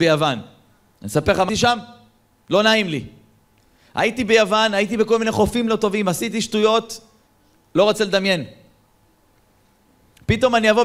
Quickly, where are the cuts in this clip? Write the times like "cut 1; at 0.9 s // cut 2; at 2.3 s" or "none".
cut 1; at 1.5 s